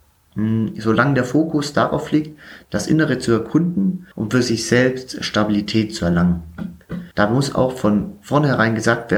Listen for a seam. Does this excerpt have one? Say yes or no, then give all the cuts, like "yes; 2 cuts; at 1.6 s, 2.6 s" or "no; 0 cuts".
yes; 2 cuts; at 4.1 s, 7.1 s